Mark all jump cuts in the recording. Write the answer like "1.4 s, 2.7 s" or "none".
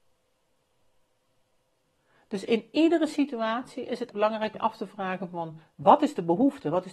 4.1 s, 4.5 s